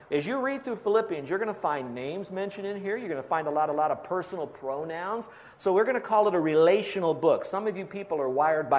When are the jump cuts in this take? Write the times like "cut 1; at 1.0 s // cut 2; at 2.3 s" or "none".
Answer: cut 1; at 3.7 s